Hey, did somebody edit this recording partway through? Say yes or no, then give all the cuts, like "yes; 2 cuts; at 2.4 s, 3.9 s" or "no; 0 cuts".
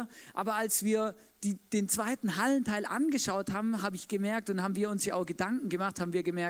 no; 0 cuts